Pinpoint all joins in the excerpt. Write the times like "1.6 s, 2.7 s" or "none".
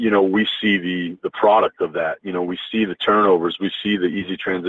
1.2 s